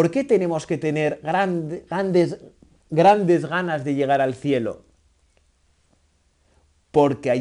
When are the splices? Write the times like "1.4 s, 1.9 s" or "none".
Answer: none